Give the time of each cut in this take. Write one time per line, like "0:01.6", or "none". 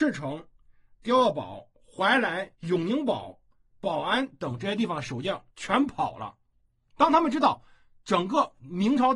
0:02.5
0:05.5